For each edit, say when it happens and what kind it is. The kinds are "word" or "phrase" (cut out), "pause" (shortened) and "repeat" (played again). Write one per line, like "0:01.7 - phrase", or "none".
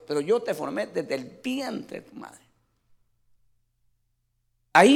none